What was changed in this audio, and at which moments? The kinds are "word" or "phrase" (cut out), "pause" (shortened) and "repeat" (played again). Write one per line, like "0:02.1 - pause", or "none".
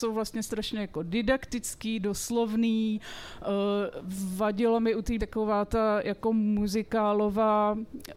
0:05.2 - word